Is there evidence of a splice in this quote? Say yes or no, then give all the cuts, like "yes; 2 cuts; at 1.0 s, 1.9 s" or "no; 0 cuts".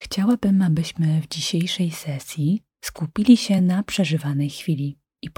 no; 0 cuts